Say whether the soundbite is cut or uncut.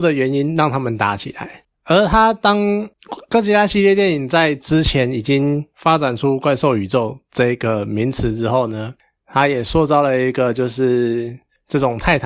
uncut